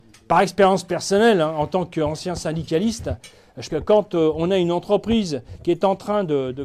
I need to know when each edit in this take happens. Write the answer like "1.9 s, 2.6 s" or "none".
3.7 s